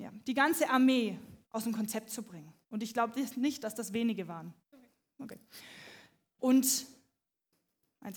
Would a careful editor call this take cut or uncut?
cut